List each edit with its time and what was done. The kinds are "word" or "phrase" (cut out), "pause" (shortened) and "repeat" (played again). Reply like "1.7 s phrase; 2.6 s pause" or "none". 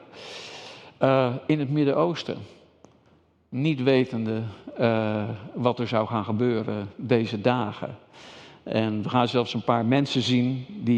none